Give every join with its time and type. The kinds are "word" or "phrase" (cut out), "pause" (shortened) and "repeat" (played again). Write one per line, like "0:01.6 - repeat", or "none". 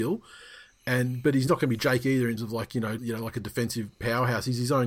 0:01.5 - word
0:02.4 - word
0:03.0 - word